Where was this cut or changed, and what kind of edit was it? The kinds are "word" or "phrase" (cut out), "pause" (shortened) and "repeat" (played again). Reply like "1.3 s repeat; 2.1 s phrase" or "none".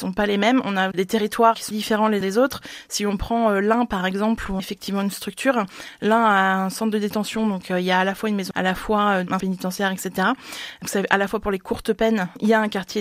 0.9 s word; 1.7 s word; 2.2 s word; 4.6 s word; 8.5 s word; 9.4 s word